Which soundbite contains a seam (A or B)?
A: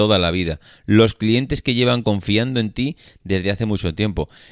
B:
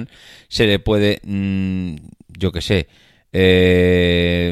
A